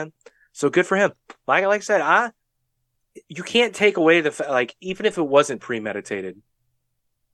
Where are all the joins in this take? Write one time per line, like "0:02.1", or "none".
0:03.2